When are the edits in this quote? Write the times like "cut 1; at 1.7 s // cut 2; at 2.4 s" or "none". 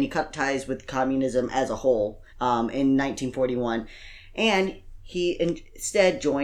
cut 1; at 2.3 s